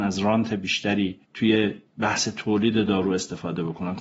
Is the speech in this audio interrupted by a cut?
yes; 1 cut; at 1.2 s

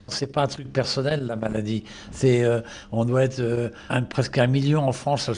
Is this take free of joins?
no; 1 cut; at 3.9 s

